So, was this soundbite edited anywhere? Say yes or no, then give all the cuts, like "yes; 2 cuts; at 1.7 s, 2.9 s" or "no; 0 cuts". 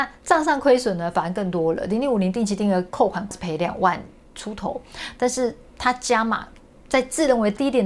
no; 0 cuts